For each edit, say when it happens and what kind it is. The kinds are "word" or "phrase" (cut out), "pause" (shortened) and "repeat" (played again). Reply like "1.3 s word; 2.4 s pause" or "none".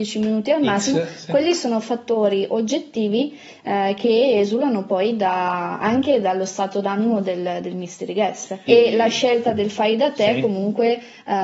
8.7 s word